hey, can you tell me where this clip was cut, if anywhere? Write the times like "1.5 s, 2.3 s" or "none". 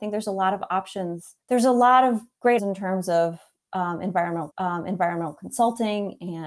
1.4 s, 2.6 s, 4.5 s